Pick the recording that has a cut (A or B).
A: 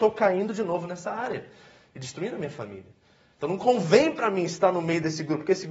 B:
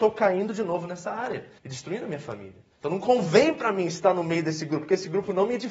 B